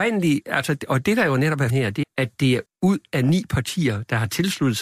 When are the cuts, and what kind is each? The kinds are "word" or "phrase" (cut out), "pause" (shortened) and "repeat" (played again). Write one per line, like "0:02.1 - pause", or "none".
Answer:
0:01.7 - word
0:02.0 - word
0:02.7 - word